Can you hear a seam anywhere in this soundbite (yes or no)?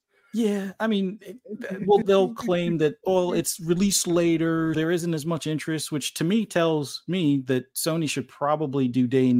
yes